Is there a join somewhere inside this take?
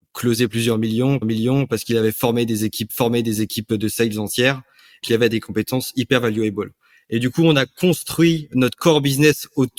yes; 3 cuts; at 1.2 s, 2.9 s, 5.0 s

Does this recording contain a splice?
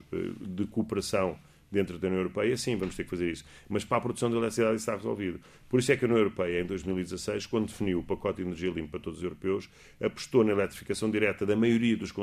no; 0 cuts

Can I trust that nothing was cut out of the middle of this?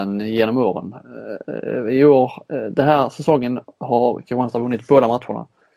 yes; 0 cuts

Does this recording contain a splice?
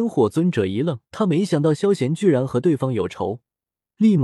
yes; 1 cut; at 1.1 s

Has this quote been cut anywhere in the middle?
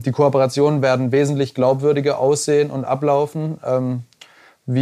no; 0 cuts

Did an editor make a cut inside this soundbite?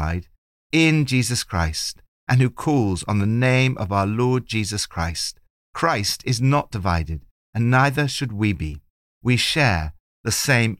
no; 0 cuts

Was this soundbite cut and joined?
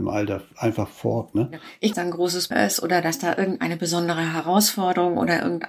yes; 2 cuts; at 1.9 s, 2.5 s

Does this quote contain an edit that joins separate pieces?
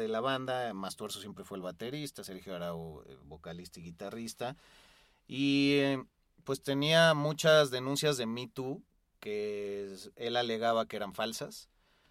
no; 0 cuts

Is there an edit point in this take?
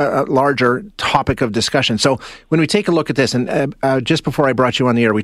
no; 0 cuts

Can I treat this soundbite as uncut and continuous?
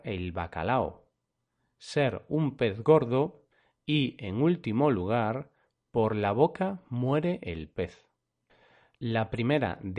yes; 0 cuts

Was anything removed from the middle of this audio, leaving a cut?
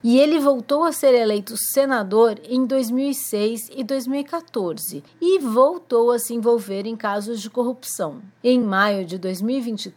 no; 0 cuts

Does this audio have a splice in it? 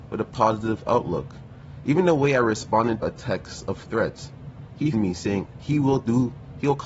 yes; 2 cuts; at 3.0 s, 4.9 s

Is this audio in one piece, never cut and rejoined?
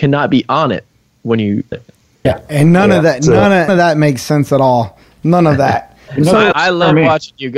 no; 5 cuts; at 1.7 s, 2.2 s, 3.7 s, 6.1 s, 6.5 s

